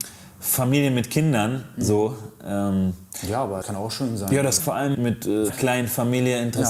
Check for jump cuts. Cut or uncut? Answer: cut